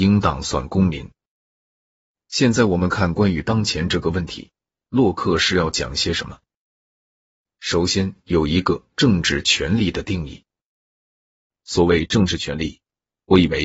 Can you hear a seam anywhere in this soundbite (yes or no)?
no